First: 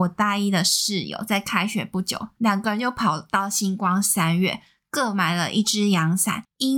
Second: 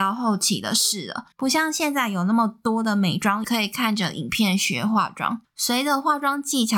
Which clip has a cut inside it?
second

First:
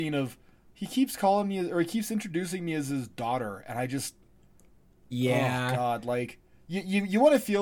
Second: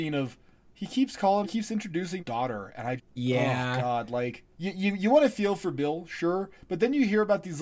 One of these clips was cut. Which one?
second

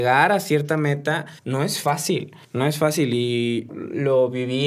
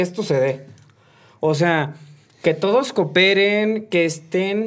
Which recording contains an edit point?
first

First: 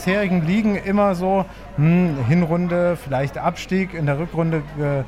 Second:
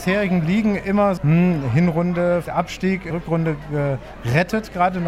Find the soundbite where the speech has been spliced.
second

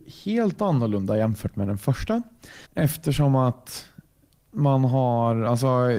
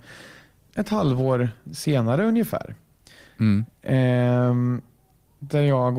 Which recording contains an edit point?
first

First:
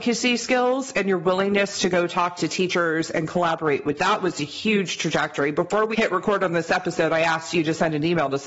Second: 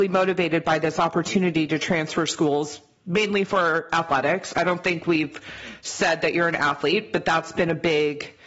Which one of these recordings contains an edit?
first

